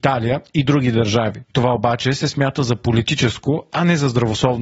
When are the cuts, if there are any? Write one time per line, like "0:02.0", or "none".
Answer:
none